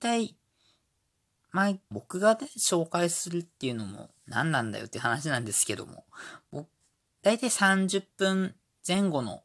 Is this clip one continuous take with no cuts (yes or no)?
no